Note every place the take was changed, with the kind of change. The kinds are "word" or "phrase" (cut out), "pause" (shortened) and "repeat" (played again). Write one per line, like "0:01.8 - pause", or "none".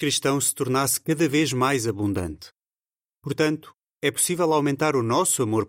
none